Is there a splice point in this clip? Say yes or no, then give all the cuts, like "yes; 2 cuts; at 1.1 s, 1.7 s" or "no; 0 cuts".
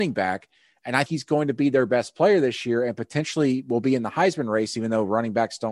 yes; 1 cut; at 1.0 s